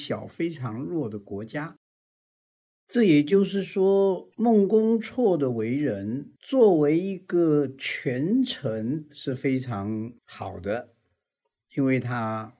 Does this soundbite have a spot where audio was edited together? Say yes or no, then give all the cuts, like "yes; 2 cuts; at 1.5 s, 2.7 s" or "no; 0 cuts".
yes; 2 cuts; at 6.4 s, 10.2 s